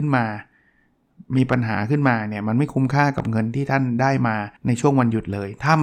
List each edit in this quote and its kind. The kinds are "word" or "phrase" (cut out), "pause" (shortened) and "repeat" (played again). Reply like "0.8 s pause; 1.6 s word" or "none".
1.2 s pause; 4.6 s pause